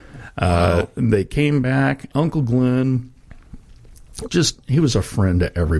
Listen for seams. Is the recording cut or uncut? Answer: cut